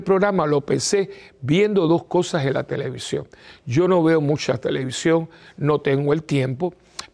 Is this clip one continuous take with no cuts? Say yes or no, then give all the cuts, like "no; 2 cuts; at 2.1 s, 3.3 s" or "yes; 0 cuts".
yes; 0 cuts